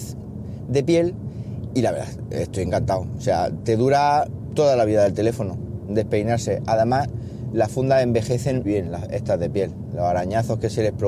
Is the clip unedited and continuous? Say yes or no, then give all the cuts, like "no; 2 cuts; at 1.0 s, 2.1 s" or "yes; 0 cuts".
no; 3 cuts; at 1.7 s, 5.9 s, 8.6 s